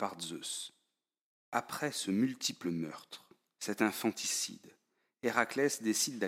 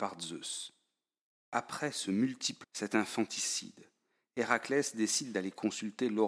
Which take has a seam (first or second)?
second